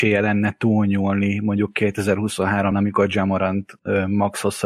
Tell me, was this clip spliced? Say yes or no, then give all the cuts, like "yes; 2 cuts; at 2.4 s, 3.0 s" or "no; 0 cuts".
yes; 1 cut; at 2.7 s